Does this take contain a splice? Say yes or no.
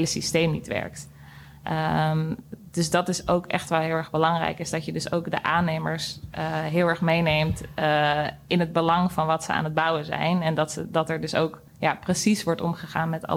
yes